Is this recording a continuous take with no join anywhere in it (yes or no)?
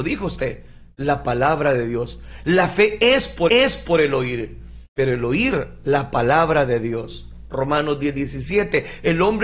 no